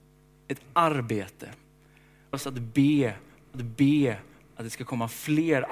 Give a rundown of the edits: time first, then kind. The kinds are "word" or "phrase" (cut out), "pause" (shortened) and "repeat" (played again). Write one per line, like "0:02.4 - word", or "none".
0:02.3 - phrase
0:03.5 - repeat

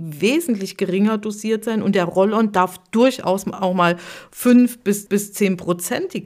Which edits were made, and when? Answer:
0:05.1 - repeat

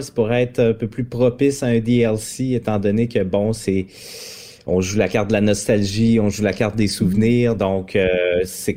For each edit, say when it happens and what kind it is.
none

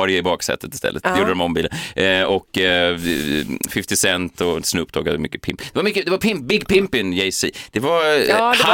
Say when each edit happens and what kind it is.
none

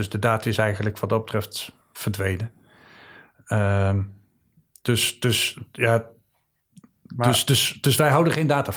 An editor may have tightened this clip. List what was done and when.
none

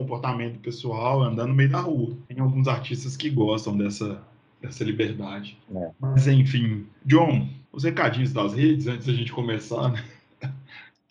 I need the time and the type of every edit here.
0:02.3 - pause
0:05.6 - pause
0:07.7 - pause

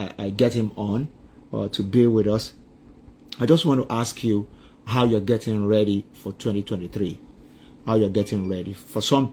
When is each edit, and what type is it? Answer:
none

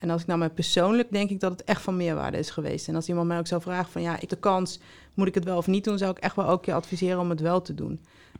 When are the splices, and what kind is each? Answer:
0:01.1 - word
0:04.3 - word

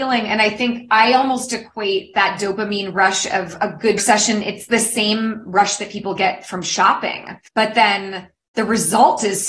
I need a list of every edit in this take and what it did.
0:04.0 - word
0:07.5 - pause

